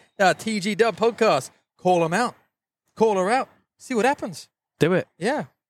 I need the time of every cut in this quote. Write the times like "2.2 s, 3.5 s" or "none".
none